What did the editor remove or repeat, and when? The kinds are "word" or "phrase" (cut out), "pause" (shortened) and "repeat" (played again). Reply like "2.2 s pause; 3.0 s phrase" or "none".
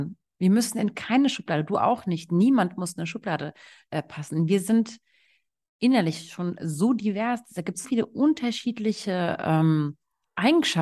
7.8 s word